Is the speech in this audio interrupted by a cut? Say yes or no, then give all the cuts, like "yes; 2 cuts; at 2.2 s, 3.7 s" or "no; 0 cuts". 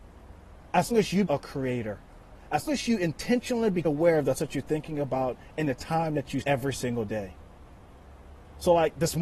yes; 6 cuts; at 0.9 s, 1.3 s, 2.7 s, 3.8 s, 4.3 s, 6.4 s